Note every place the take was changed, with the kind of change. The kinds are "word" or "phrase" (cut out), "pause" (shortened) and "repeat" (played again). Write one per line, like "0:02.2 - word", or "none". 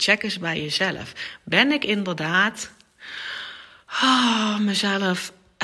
none